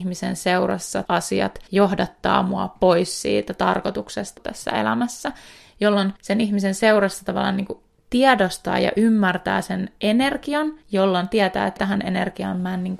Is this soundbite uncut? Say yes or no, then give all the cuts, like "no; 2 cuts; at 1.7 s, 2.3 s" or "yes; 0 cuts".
no; 7 cuts; at 1.0 s, 1.7 s, 4.4 s, 6.2 s, 8.0 s, 10.8 s, 11.8 s